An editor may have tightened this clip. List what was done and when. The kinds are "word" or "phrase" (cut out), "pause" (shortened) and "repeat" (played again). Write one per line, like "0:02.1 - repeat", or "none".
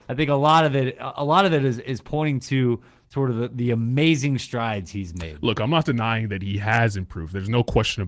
none